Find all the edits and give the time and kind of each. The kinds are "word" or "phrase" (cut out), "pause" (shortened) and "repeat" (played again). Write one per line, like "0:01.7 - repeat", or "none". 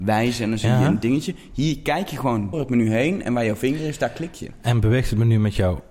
0:02.5 - word